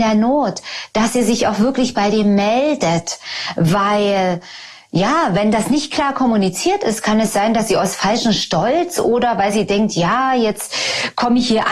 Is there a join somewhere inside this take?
no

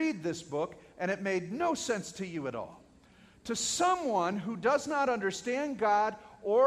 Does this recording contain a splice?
no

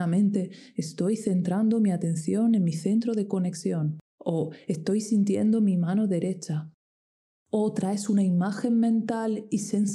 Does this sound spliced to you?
yes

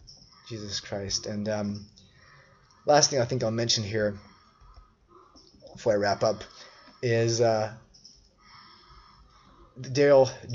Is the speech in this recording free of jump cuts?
yes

